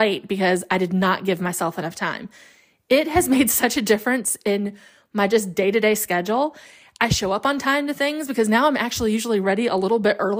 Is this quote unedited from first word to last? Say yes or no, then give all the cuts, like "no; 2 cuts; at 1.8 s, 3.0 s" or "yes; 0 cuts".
yes; 0 cuts